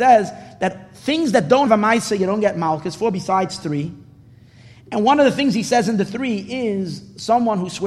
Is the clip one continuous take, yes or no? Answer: no